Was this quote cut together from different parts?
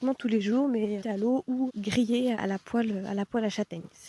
yes; 3 cuts; at 1.0 s, 1.7 s, 2.3 s

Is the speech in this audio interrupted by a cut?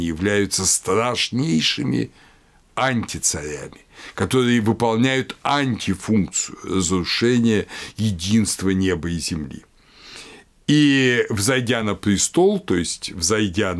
no; 0 cuts

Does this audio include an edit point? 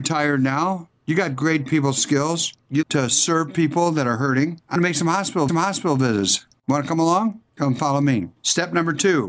yes; 3 cuts; at 2.8 s, 4.8 s, 5.5 s

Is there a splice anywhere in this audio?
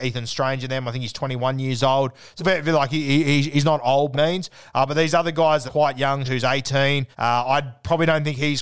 yes; 5 cuts; at 2.4 s, 4.1 s, 5.7 s, 6.2 s, 7.1 s

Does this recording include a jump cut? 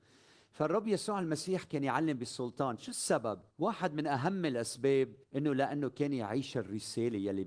yes; 2 cuts; at 3.5 s, 5.2 s

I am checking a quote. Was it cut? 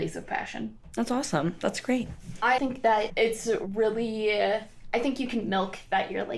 yes; 2 cuts; at 2.6 s, 3.1 s

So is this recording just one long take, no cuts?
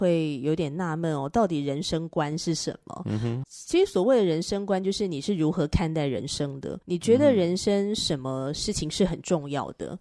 no; 2 cuts; at 3.4 s, 6.8 s

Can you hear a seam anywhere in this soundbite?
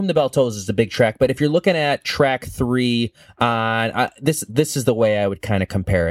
no; 0 cuts

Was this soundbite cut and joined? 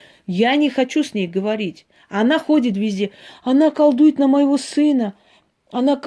yes; 1 cut; at 1.9 s

